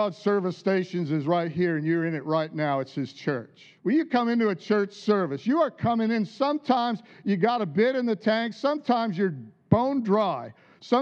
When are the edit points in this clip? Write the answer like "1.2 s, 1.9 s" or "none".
3.8 s